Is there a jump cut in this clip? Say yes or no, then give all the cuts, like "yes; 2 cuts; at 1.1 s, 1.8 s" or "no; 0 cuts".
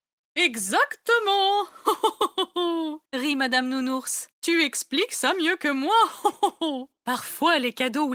yes; 3 cuts; at 3.1 s, 4.3 s, 7.0 s